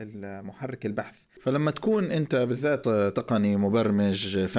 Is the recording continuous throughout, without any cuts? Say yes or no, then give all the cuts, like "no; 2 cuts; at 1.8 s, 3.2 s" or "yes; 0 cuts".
no; 1 cut; at 2.8 s